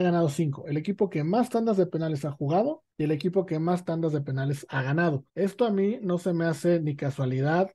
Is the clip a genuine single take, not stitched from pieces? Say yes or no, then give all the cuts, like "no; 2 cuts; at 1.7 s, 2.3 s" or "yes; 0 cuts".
no; 2 cuts; at 2.9 s, 5.3 s